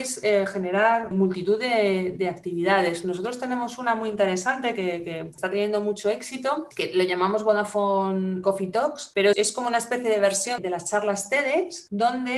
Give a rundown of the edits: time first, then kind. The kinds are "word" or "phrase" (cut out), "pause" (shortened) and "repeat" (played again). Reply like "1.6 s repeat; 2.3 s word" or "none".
1.1 s word; 8.4 s word; 9.3 s word; 10.6 s word

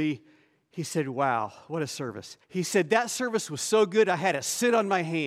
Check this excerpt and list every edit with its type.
2.4 s pause

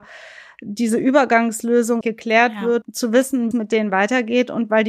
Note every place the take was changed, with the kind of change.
2.0 s word; 2.8 s word; 3.5 s word

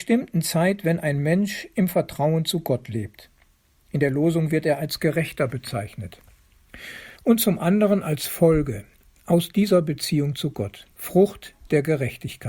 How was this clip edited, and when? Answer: 7.2 s pause; 10.9 s pause

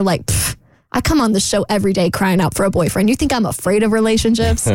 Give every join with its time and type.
none

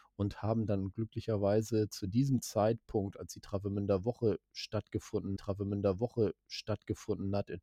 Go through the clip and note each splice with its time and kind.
5.4 s repeat

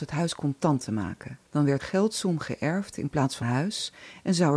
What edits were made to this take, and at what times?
1.5 s pause; 1.8 s word; 3.4 s word

